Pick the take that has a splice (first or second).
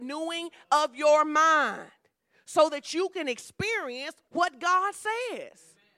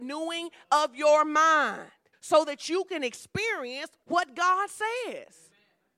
second